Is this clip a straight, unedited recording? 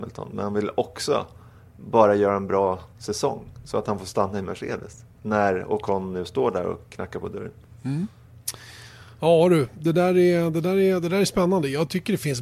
yes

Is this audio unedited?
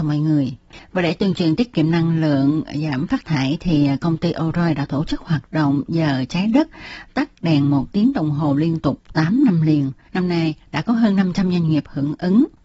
yes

